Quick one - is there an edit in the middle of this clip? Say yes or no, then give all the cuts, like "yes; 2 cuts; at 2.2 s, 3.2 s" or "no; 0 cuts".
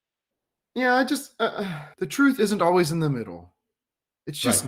yes; 1 cut; at 1.9 s